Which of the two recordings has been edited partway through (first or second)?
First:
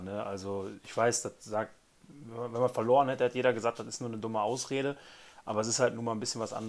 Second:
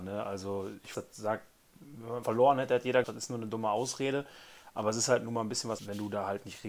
second